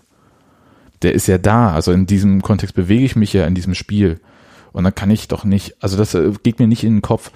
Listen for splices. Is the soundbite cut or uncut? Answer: uncut